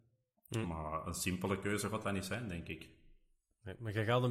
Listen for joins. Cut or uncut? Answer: uncut